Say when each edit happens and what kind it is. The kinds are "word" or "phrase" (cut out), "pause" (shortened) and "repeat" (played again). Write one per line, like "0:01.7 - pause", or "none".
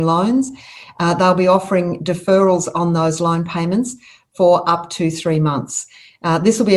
none